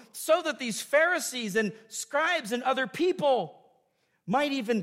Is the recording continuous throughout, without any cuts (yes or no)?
yes